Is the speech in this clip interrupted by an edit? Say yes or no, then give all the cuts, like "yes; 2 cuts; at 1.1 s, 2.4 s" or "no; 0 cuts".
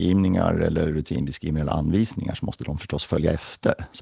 no; 0 cuts